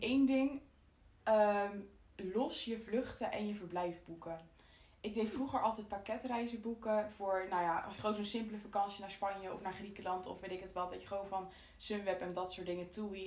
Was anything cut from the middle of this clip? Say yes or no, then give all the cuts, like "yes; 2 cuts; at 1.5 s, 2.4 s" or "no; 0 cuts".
no; 0 cuts